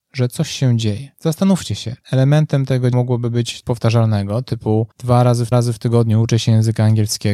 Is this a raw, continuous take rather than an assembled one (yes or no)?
no